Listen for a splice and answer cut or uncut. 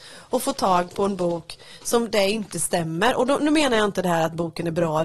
uncut